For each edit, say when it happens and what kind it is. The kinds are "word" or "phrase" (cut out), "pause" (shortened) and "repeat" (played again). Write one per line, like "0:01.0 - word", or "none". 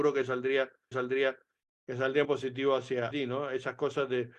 0:00.9 - repeat
0:02.2 - word
0:03.1 - word